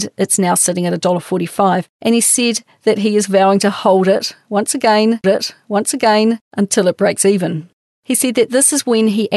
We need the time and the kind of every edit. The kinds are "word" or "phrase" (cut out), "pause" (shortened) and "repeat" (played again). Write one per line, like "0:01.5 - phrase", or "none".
0:05.2 - repeat